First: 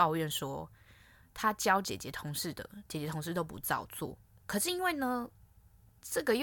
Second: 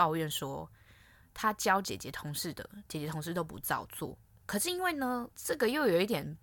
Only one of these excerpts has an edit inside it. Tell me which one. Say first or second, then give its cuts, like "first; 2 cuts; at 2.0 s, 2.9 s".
second; 1 cut; at 5.3 s